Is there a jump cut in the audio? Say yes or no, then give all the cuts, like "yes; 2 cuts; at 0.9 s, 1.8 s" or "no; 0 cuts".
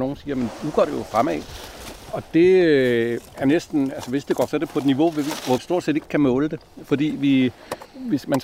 yes; 3 cuts; at 3.3 s, 4.5 s, 5.6 s